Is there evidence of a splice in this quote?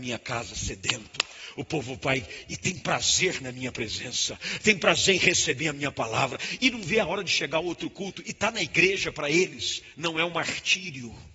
no; 0 cuts

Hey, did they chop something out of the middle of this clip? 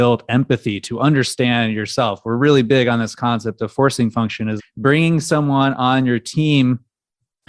yes; 1 cut; at 4.6 s

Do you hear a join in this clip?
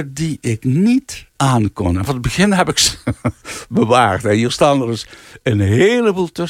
yes; 2 cuts; at 1.3 s, 2.1 s

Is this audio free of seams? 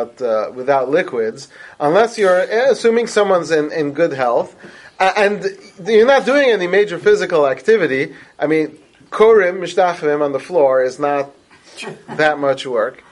yes; 0 cuts

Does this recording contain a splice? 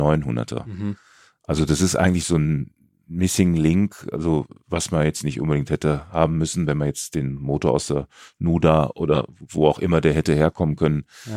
no; 0 cuts

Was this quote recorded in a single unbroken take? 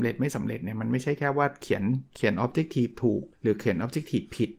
no; 1 cut; at 3.3 s

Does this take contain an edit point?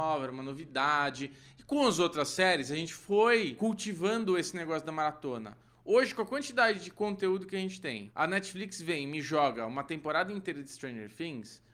no; 0 cuts

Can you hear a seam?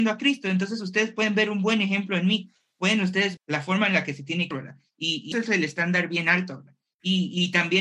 yes; 3 cuts; at 3.4 s, 4.5 s, 5.3 s

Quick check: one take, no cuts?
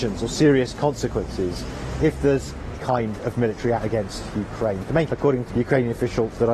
no; 4 cuts; at 2.8 s, 3.8 s, 5.1 s, 5.5 s

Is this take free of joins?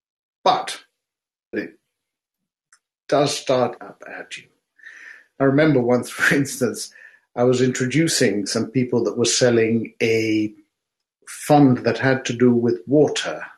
no; 2 cuts; at 1.5 s, 3.8 s

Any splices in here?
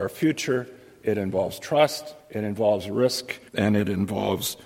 yes; 2 cuts; at 2.2 s, 3.5 s

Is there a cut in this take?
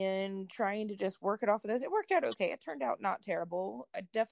no; 0 cuts

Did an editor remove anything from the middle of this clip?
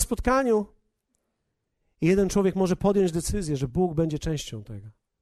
no; 0 cuts

